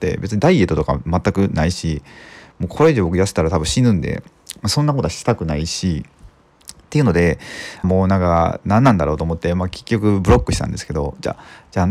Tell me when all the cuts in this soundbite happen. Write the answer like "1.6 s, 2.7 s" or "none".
7.8 s